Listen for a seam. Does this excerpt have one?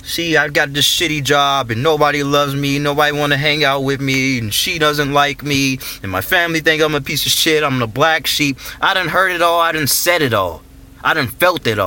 no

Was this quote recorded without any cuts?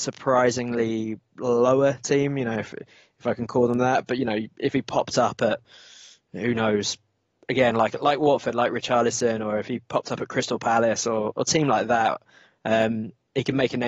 yes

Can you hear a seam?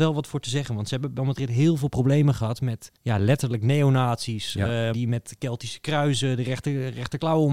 yes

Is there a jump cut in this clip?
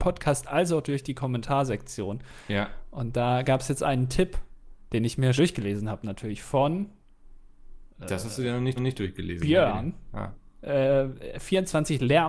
yes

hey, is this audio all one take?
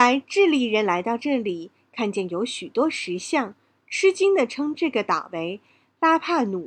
yes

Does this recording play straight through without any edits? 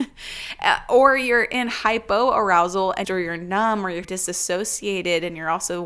no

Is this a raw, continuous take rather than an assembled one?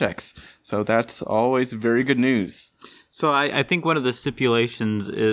yes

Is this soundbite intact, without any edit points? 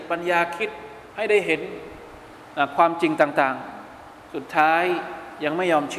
no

